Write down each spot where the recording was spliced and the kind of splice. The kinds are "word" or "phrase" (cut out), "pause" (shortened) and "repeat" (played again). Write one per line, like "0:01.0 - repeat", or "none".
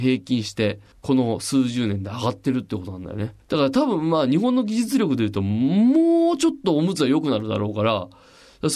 0:00.9 - pause
0:03.4 - pause